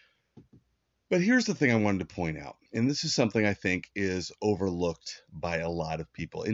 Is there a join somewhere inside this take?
yes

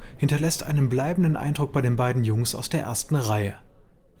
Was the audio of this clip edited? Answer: no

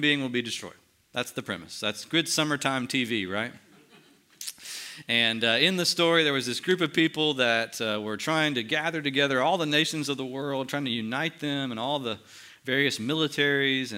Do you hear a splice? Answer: no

